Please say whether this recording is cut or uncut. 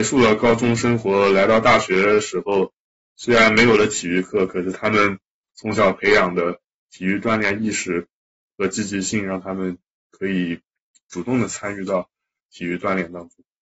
uncut